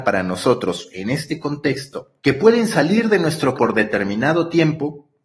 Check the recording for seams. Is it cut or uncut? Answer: cut